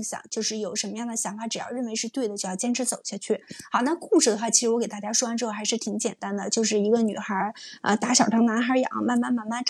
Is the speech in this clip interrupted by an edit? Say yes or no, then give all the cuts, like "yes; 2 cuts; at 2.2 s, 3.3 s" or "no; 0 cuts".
no; 0 cuts